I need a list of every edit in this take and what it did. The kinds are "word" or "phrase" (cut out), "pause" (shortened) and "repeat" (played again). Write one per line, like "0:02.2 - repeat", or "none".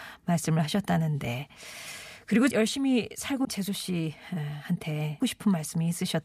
0:02.5 - word
0:03.4 - word
0:05.2 - word